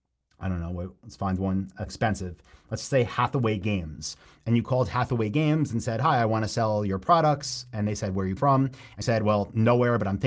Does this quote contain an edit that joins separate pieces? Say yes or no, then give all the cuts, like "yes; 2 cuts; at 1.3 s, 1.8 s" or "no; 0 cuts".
yes; 3 cuts; at 1.9 s, 8.4 s, 9.0 s